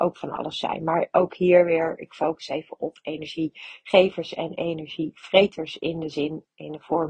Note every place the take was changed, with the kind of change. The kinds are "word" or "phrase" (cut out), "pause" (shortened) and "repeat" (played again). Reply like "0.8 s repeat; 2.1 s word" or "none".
none